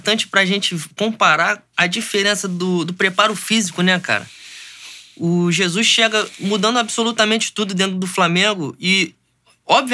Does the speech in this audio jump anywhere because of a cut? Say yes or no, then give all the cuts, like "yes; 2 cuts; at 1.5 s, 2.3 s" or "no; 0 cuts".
no; 0 cuts